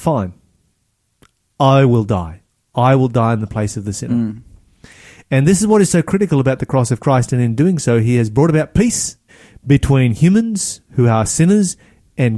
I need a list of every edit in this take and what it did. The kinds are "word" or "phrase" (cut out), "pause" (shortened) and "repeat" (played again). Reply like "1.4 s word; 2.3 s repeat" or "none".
9.3 s pause

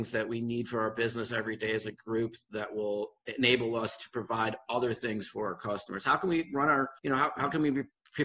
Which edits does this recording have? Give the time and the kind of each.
7.0 s pause

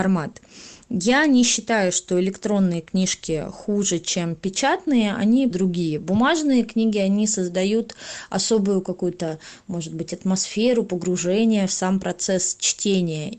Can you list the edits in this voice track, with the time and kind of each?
5.5 s phrase

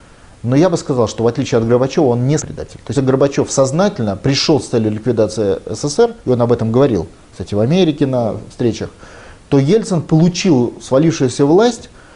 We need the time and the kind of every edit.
2.4 s word; 2.9 s word; 6.2 s pause

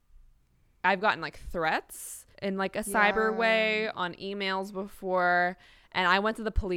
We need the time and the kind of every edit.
2.3 s pause

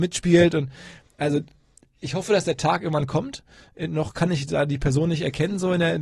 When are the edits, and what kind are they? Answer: none

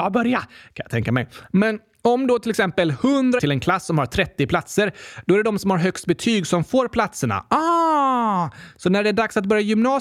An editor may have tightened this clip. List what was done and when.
3.4 s phrase

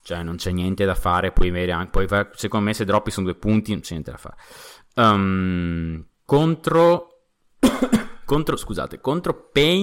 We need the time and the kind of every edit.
6.1 s pause

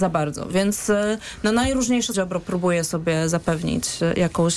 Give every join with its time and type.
2.1 s word

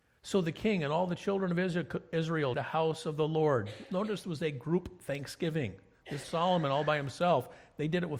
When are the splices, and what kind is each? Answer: 2.5 s word; 4.2 s word; 6.2 s word

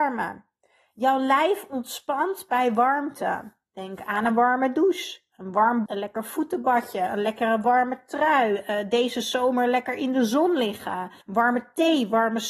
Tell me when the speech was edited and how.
5.9 s word; 11.2 s pause

